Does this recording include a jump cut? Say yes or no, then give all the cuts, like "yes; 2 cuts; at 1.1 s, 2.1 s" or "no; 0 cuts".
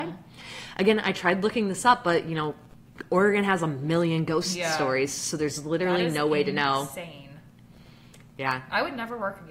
no; 0 cuts